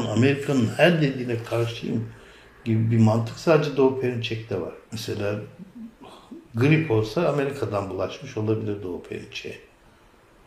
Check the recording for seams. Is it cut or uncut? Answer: cut